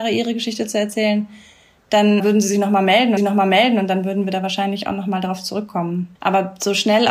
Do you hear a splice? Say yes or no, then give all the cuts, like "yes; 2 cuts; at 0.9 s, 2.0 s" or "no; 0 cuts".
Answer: yes; 3 cuts; at 2.2 s, 3.2 s, 6.1 s